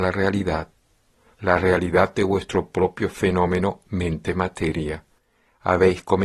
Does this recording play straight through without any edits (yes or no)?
yes